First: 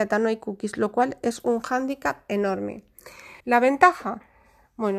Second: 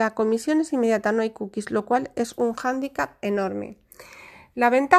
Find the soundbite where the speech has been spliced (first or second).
first